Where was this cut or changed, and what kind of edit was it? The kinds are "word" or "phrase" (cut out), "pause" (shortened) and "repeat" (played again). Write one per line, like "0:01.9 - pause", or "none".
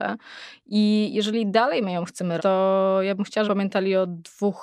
0:02.4 - word
0:03.5 - word